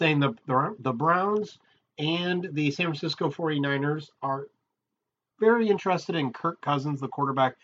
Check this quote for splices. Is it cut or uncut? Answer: uncut